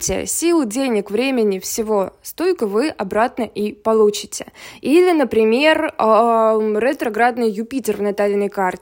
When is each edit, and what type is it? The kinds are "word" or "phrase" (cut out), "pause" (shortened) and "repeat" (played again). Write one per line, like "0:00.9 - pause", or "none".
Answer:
none